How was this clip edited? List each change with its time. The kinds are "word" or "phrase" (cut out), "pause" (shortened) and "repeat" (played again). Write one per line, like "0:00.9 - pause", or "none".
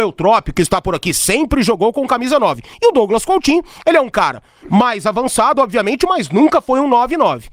none